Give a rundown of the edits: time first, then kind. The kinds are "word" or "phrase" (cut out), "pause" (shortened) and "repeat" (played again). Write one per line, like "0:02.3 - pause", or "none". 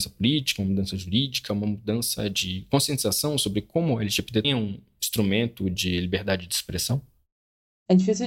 0:04.4 - word